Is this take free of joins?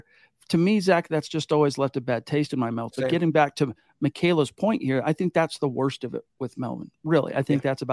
yes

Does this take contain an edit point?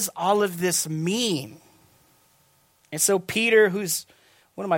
no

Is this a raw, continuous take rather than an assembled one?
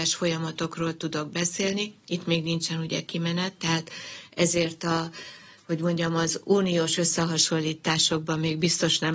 yes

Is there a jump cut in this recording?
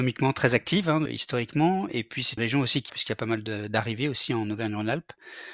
yes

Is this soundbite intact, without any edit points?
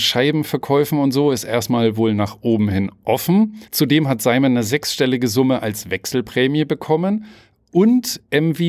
no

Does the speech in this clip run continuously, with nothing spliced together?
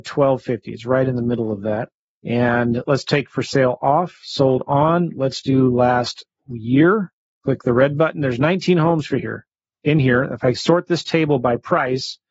yes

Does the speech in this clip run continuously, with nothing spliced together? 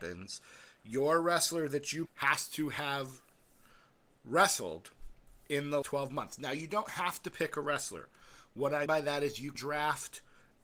no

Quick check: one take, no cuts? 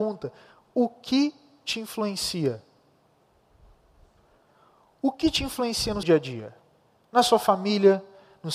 no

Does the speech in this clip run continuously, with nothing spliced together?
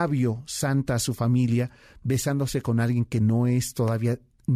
yes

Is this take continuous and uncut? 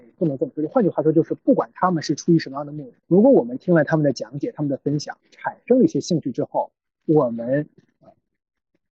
no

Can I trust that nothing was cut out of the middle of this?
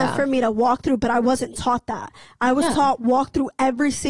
yes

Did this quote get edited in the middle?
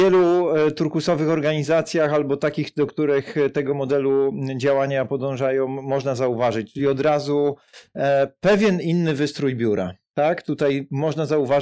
no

